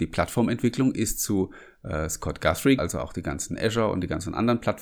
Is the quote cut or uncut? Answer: cut